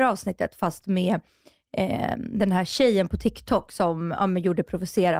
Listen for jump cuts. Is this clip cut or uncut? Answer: uncut